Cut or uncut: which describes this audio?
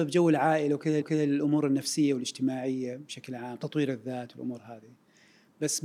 cut